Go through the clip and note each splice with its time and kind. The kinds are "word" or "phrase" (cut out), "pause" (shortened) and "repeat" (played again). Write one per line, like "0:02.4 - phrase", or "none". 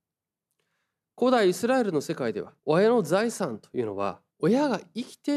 0:02.6 - pause
0:04.3 - pause